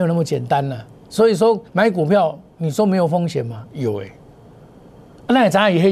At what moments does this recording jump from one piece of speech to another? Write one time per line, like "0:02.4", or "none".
0:01.7